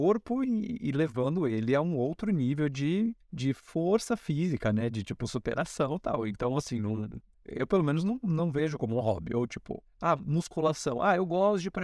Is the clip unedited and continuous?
no; 3 cuts; at 3.2 s, 7.3 s, 9.9 s

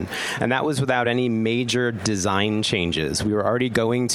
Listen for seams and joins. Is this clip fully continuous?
yes; 0 cuts

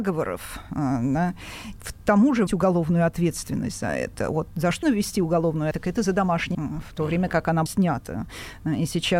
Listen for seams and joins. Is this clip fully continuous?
no; 6 cuts; at 1.8 s, 2.5 s, 4.8 s, 5.7 s, 6.5 s, 7.7 s

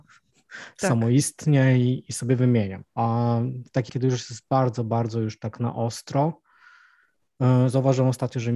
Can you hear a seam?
yes; 2 cuts; at 2.9 s, 3.9 s

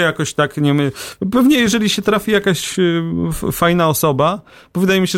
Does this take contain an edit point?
no; 0 cuts

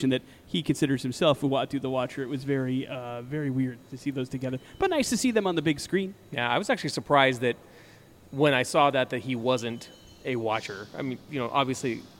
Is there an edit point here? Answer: no; 0 cuts

